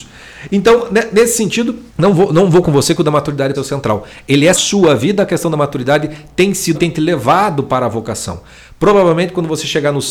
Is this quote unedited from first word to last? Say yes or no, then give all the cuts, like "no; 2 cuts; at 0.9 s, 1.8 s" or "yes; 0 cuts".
no; 5 cuts; at 1.9 s, 2.6 s, 3.5 s, 4.5 s, 6.7 s